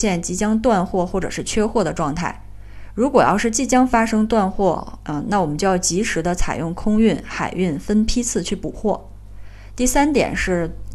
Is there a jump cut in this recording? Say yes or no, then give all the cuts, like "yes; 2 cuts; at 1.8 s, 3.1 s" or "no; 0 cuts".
no; 0 cuts